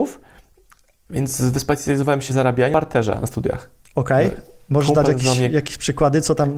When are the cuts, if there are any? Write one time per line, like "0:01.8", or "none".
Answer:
0:02.3
0:02.7
0:03.8